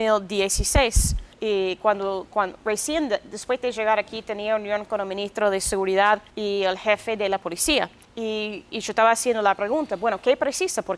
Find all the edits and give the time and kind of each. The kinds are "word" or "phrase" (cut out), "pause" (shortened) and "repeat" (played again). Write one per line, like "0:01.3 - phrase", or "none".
0:01.3 - pause
0:06.3 - pause
0:08.0 - pause